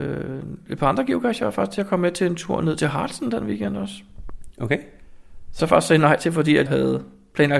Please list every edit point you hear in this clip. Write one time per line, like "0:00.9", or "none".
0:05.6
0:06.7

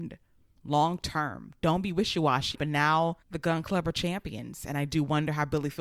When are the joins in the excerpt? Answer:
0:02.5

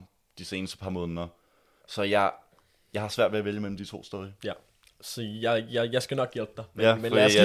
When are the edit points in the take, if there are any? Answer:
none

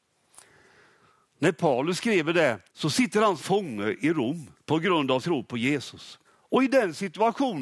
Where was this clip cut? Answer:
0:02.7
0:03.4
0:04.5
0:05.2
0:06.2

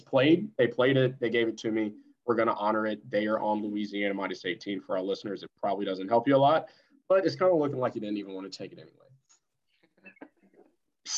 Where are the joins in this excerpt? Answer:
none

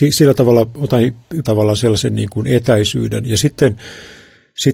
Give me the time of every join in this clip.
0:01.4

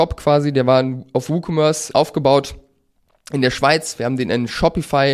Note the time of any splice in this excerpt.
0:01.9

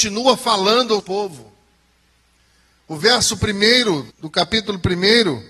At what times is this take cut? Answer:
0:01.0
0:04.1

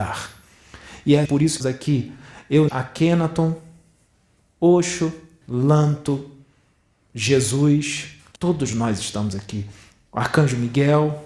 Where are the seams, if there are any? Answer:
0:01.2
0:01.6
0:02.7
0:05.4
0:08.4

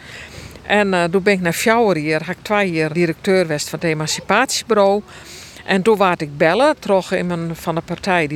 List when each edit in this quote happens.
0:02.9

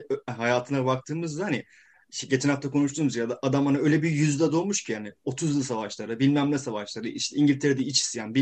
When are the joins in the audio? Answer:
none

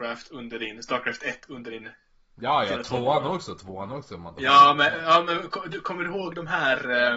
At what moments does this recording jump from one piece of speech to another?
none

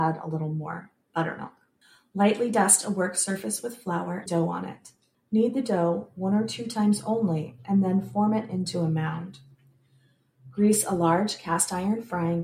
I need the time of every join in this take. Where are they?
0:01.8
0:04.3

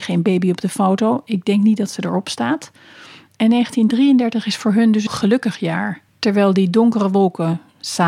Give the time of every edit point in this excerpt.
0:05.1
0:06.1

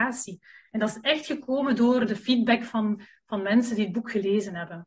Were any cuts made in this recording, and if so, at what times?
none

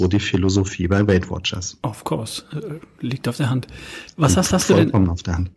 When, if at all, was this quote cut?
0:04.5

